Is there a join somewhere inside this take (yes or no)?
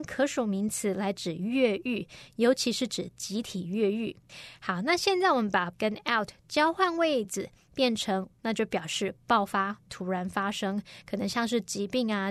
yes